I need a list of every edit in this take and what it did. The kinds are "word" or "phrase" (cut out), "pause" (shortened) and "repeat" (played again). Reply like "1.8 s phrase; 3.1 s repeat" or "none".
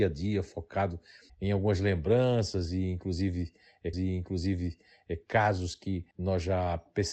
1.3 s word; 3.9 s repeat; 6.1 s pause